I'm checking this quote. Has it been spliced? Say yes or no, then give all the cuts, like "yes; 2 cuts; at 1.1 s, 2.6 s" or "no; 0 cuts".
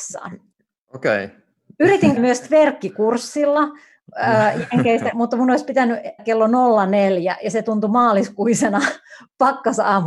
yes; 3 cuts; at 2.2 s, 5.1 s, 6.2 s